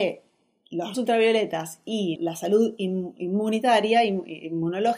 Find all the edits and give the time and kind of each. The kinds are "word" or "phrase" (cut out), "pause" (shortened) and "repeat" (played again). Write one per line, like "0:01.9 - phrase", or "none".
0:00.9 - word
0:02.2 - word